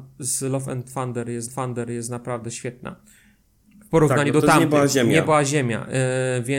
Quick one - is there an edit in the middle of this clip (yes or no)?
yes